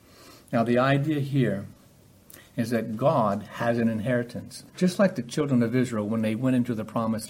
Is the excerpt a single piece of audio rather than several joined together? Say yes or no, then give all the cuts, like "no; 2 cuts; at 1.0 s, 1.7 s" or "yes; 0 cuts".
no; 1 cut; at 4.7 s